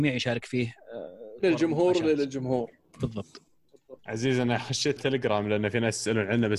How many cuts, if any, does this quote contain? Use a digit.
3